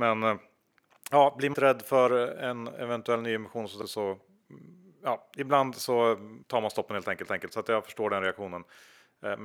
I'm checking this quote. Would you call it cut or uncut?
cut